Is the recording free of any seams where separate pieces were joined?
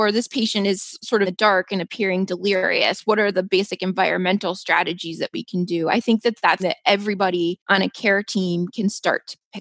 no; 2 cuts; at 1.2 s, 6.6 s

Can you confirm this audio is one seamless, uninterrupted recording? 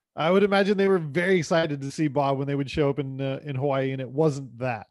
yes; 0 cuts

